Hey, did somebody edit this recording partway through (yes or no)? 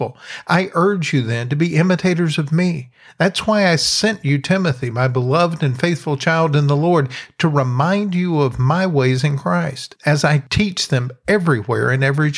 no